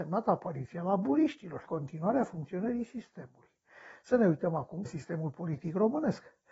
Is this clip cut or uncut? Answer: cut